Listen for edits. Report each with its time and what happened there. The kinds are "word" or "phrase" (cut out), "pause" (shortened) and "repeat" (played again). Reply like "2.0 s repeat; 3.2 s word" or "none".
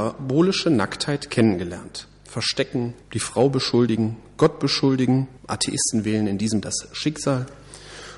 3.0 s pause; 5.4 s pause; 6.6 s word